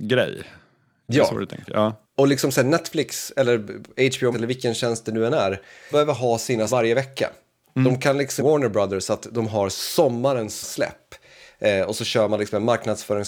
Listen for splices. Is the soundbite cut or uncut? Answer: cut